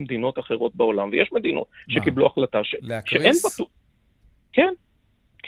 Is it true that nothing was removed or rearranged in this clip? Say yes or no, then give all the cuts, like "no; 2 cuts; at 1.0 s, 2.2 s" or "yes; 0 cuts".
yes; 0 cuts